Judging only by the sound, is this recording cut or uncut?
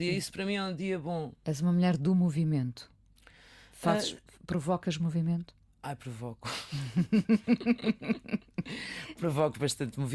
uncut